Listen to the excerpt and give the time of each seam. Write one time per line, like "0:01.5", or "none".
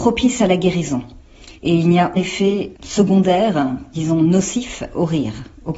0:01.6
0:02.2